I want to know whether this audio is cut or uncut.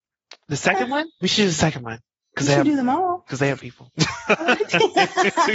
cut